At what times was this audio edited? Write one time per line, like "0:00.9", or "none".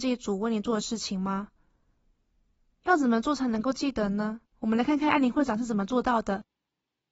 0:04.5